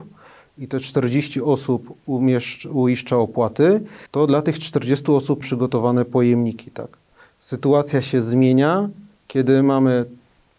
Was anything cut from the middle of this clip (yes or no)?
yes